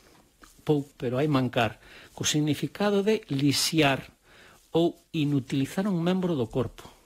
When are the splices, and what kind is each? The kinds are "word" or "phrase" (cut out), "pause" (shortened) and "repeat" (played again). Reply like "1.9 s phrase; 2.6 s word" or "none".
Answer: 0.9 s word